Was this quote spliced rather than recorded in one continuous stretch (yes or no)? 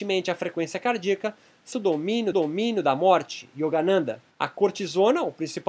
yes